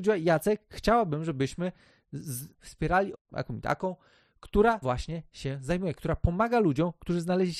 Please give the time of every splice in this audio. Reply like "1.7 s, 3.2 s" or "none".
2.5 s, 3.1 s, 4.8 s

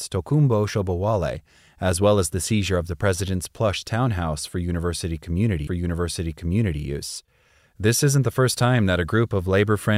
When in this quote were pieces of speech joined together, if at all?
5.7 s

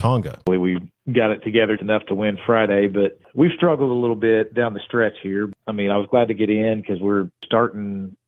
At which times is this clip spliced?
1.8 s

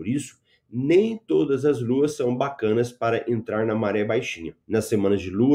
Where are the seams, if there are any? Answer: 4.6 s

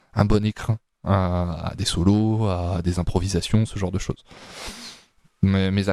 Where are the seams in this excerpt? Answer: none

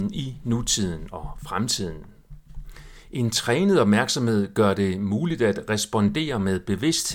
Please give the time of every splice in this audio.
none

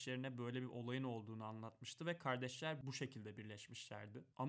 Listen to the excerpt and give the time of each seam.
none

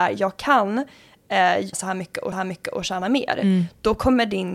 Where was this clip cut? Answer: 1.7 s, 2.3 s

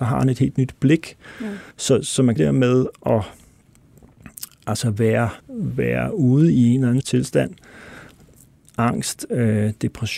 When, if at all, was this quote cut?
1.7 s, 2.4 s, 5.4 s, 7.0 s

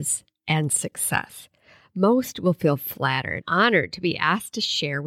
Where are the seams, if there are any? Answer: 3.4 s

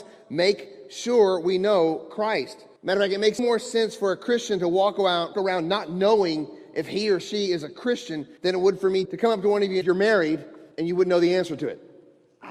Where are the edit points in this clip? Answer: 2.8 s, 3.4 s, 5.3 s, 8.4 s, 9.1 s, 9.8 s, 10.7 s

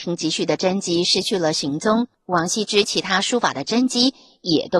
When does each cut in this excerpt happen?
2.1 s

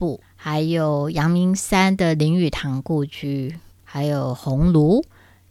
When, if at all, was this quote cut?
3.7 s

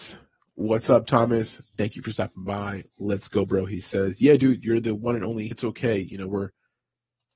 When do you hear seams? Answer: 3.4 s, 5.5 s

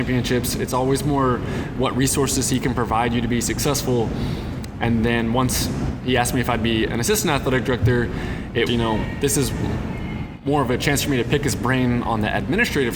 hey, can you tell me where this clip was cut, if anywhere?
8.7 s

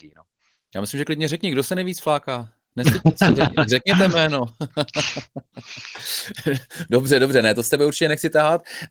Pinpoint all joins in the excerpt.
none

